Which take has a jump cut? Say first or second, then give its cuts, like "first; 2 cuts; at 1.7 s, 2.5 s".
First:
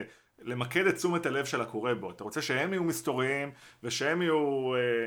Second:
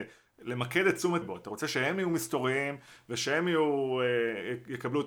second; 1 cut; at 1.2 s